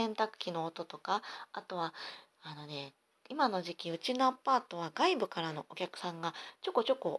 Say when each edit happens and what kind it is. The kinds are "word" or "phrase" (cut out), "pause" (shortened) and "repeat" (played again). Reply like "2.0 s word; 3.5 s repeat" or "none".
none